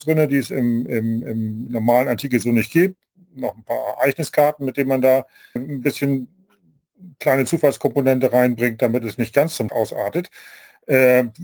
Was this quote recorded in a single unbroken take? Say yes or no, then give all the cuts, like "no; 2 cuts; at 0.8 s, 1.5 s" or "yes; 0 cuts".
no; 3 cuts; at 1.7 s, 5.6 s, 9.7 s